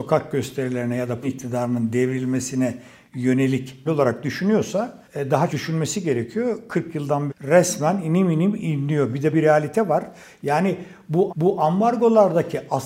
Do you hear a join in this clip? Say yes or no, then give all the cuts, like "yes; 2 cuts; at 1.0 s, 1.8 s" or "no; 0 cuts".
yes; 7 cuts; at 1.2 s, 3.9 s, 5.0 s, 5.5 s, 7.3 s, 9.3 s, 11.3 s